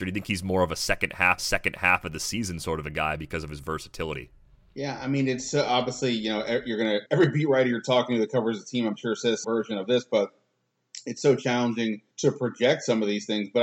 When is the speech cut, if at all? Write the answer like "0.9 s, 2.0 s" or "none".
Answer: 1.4 s, 4.5 s, 7.1 s, 9.4 s, 12.1 s